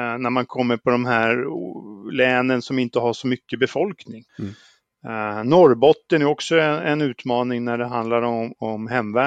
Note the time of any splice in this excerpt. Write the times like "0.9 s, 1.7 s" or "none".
4.3 s